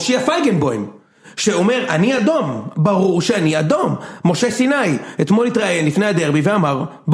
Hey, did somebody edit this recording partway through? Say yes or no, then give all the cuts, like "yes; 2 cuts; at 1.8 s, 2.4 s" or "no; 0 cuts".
no; 0 cuts